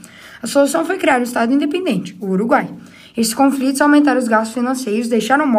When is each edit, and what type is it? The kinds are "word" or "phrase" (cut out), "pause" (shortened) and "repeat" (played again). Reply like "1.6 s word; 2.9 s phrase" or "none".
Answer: none